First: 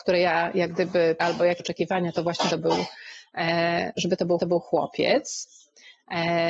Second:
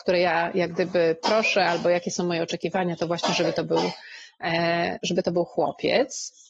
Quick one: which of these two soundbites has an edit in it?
first; 4 cuts; at 1.2 s, 1.6 s, 2.5 s, 4.4 s

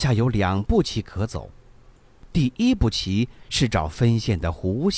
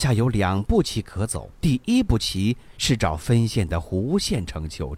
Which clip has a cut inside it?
second; 1 cut; at 1.5 s

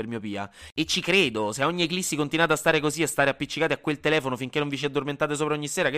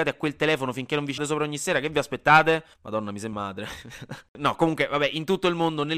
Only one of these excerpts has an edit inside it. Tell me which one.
second; 3 cuts; at 1.2 s, 2.7 s, 3.3 s

